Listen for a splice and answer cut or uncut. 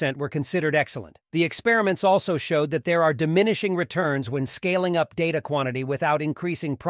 cut